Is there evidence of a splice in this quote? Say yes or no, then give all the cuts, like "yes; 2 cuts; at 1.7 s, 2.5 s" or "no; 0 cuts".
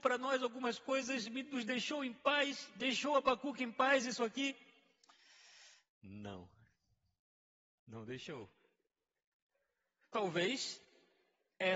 no; 0 cuts